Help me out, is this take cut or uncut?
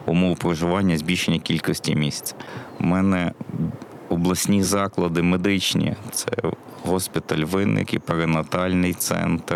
uncut